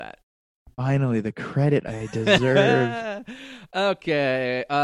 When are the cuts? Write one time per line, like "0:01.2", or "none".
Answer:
none